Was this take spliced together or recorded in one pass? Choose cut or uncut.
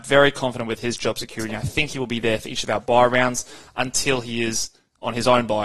uncut